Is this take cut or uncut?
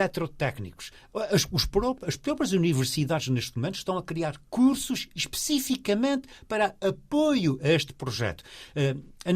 uncut